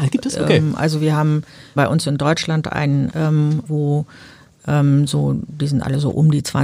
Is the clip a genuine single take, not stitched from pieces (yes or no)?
no